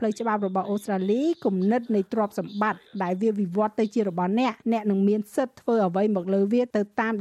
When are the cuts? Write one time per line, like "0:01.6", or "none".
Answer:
0:04.6